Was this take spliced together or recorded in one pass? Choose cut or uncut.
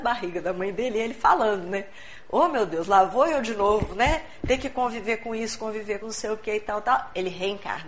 cut